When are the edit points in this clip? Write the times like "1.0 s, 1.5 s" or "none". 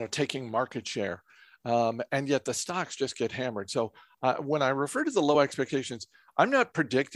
none